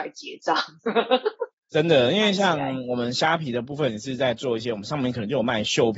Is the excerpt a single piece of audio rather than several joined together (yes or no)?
no